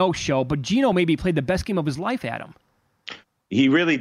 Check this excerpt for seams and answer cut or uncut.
uncut